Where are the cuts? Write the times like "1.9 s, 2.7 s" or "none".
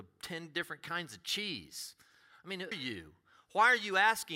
2.7 s